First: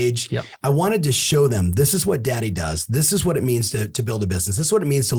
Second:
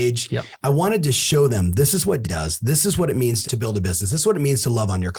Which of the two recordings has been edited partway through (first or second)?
second